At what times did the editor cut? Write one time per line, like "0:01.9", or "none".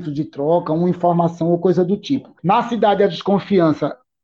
0:02.4